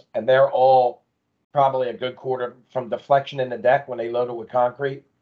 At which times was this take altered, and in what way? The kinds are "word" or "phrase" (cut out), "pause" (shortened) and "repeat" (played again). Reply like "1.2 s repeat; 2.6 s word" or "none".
none

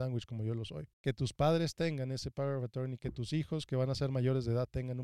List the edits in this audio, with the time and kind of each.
0.9 s pause

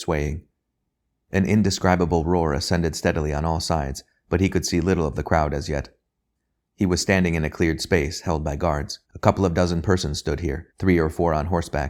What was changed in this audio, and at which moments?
9.0 s pause; 10.7 s pause

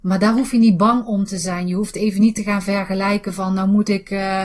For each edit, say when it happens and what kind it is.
none

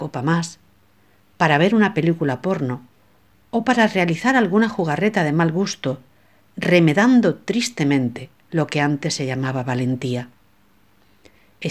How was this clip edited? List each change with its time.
none

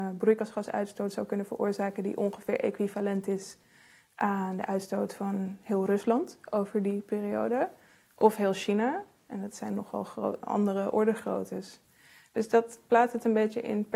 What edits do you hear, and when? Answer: none

